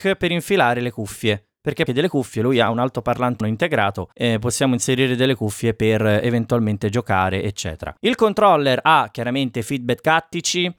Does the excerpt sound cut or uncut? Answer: cut